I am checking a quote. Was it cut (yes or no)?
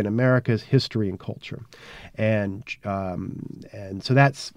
no